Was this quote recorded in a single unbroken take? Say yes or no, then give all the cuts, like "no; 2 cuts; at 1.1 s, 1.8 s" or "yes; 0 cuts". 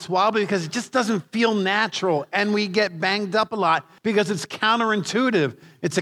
no; 1 cut; at 4.0 s